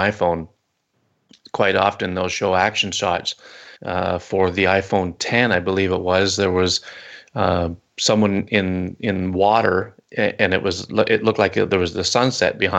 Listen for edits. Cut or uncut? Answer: cut